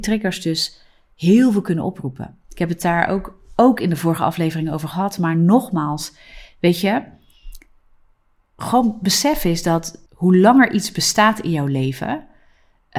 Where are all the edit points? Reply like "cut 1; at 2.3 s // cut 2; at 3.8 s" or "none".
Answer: cut 1; at 10.1 s